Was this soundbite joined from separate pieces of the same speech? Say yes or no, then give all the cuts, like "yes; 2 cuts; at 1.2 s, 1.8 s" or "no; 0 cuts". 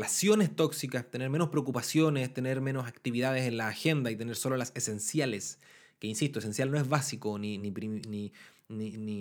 no; 0 cuts